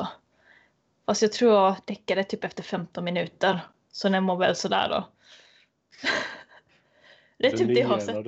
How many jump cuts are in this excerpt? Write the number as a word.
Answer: zero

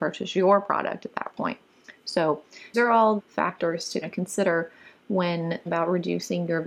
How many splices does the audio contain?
four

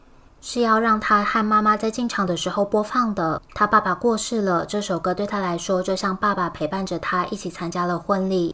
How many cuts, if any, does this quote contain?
one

